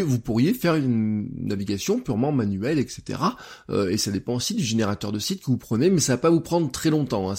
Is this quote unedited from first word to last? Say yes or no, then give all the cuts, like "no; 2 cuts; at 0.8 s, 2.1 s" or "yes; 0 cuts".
yes; 0 cuts